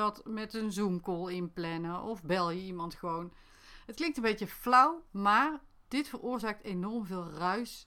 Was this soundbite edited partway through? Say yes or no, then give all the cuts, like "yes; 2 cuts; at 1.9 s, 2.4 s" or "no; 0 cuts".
no; 0 cuts